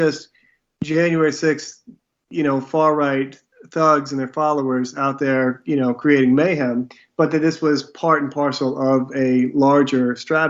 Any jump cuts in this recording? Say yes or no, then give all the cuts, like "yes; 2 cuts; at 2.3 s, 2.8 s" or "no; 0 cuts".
no; 0 cuts